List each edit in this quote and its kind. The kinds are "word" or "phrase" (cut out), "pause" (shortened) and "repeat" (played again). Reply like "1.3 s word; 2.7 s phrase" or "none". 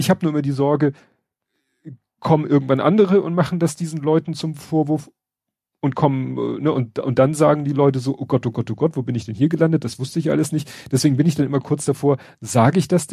none